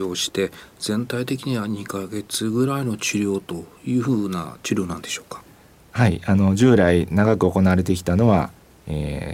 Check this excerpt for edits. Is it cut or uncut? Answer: uncut